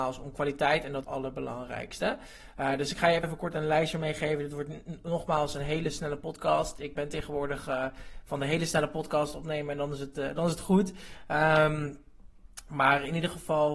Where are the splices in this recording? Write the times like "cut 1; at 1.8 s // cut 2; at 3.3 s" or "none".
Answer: cut 1; at 1.0 s // cut 2; at 3.2 s // cut 3; at 7.0 s